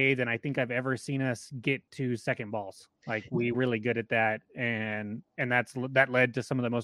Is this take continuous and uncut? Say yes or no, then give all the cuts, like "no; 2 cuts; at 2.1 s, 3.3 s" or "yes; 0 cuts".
no; 2 cuts; at 3.0 s, 3.5 s